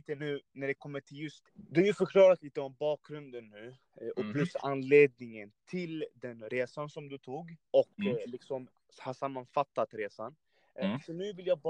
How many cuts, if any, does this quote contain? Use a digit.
2